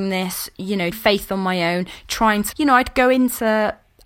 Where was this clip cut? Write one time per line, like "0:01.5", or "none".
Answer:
0:00.9
0:02.5